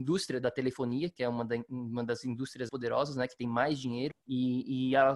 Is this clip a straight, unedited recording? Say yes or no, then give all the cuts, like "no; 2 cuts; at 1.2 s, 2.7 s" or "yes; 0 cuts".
no; 2 cuts; at 2.7 s, 4.1 s